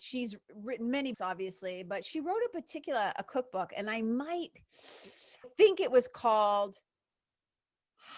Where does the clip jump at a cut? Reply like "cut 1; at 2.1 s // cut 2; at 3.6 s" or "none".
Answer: cut 1; at 1.1 s // cut 2; at 5.4 s